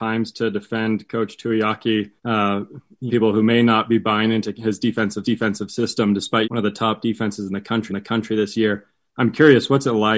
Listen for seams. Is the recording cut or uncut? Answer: cut